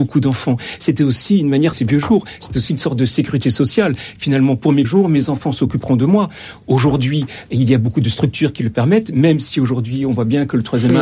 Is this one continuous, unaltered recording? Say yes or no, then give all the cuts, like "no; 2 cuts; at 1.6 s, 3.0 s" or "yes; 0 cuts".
no; 2 cuts; at 1.7 s, 4.8 s